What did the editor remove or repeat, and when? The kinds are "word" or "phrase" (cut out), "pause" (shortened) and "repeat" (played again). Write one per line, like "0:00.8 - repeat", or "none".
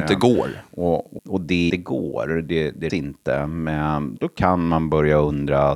0:01.2 - word
0:01.7 - word
0:02.9 - word
0:04.2 - word